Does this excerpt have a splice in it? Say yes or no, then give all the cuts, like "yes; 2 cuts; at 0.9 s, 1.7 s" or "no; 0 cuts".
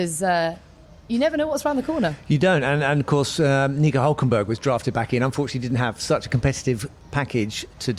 no; 0 cuts